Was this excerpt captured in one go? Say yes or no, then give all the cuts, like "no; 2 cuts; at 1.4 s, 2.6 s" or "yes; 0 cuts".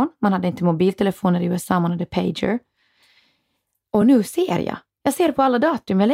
yes; 0 cuts